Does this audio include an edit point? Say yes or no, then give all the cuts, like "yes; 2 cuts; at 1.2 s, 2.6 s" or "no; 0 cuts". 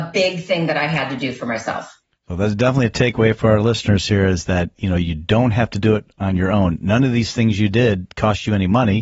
no; 0 cuts